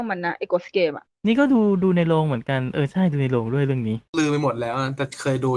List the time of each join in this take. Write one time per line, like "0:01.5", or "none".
0:04.1